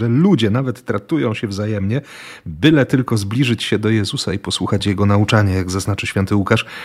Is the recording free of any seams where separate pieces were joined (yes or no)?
yes